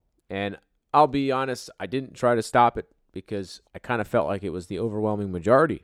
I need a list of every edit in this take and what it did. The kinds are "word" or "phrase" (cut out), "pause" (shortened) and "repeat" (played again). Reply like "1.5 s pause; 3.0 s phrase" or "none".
3.7 s pause